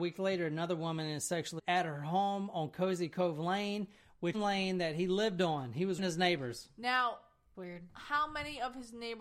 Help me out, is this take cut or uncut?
cut